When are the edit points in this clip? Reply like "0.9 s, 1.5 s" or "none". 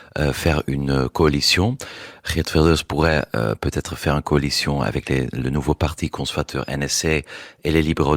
none